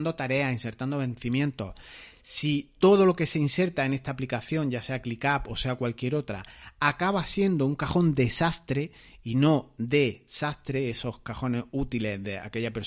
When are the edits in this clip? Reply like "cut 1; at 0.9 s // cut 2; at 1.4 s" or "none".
none